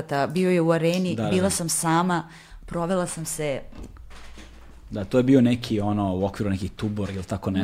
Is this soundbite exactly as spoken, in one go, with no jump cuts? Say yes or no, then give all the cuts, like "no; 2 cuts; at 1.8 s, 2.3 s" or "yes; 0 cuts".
yes; 0 cuts